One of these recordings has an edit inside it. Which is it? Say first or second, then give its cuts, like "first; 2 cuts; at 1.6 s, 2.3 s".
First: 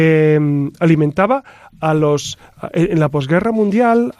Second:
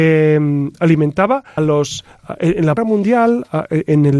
second; 2 cuts; at 1.6 s, 2.8 s